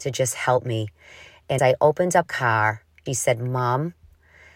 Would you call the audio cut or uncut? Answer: cut